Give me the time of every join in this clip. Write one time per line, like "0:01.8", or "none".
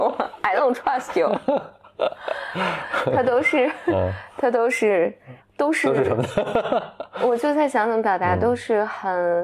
0:05.4